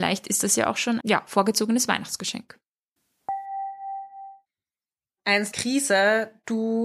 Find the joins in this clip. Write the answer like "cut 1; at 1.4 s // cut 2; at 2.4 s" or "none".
cut 1; at 1.0 s // cut 2; at 5.5 s